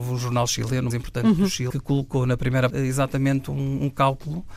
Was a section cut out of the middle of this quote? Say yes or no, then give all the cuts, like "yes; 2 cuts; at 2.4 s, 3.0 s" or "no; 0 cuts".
yes; 3 cuts; at 0.9 s, 1.7 s, 2.7 s